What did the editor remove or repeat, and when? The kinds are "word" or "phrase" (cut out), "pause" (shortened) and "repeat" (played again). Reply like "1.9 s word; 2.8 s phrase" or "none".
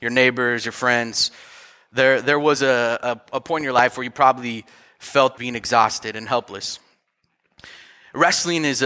5.4 s phrase

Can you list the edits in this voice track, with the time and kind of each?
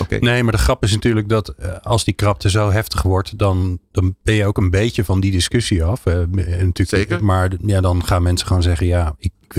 none

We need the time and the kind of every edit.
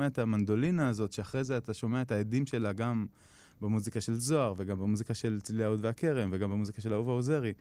none

